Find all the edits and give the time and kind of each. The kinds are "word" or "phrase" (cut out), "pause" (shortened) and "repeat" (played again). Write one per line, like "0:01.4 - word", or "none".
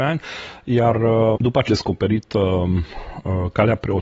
0:01.4 - word
0:01.7 - word